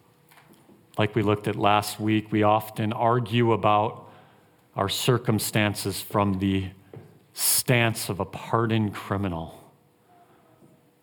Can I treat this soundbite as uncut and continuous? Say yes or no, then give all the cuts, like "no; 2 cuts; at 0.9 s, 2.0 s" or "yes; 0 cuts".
yes; 0 cuts